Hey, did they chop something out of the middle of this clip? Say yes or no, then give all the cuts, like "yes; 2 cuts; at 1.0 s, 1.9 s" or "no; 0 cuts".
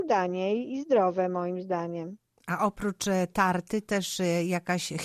no; 0 cuts